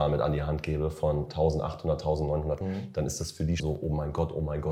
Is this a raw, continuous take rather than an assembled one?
no; 2 cuts; at 2.6 s, 3.6 s

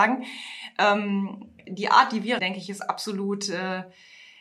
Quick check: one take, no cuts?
no; 2 cuts; at 1.7 s, 2.4 s

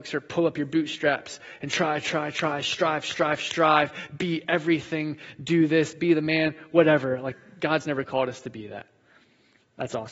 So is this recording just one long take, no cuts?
yes; 0 cuts

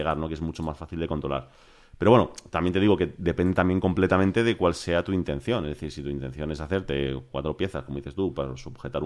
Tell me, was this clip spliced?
no; 0 cuts

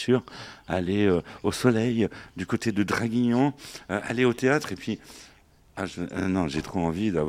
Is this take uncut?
yes; 0 cuts

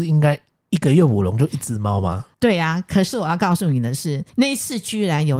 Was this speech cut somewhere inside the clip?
yes; 2 cuts; at 2.3 s, 4.3 s

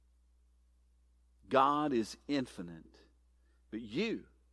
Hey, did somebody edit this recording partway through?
no; 0 cuts

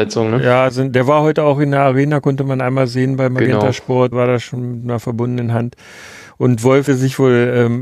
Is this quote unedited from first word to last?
no; 2 cuts; at 4.1 s, 6.9 s

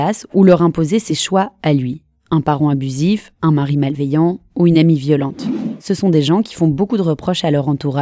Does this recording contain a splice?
no; 0 cuts

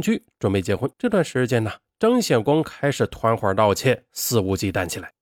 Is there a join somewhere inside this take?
yes; 1 cut; at 0.9 s

